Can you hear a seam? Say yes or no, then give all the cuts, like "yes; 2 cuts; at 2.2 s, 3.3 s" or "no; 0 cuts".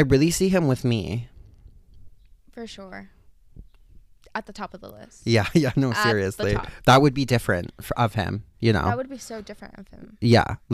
no; 0 cuts